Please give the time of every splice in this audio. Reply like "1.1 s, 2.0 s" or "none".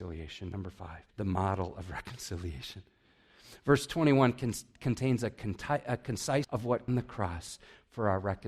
1.1 s, 6.4 s, 6.9 s